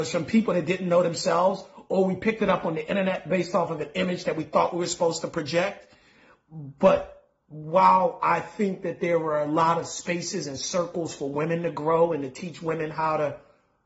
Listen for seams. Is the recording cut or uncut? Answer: uncut